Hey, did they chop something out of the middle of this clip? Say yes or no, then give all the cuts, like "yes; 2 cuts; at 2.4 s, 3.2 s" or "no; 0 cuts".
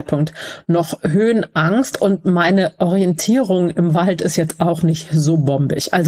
no; 0 cuts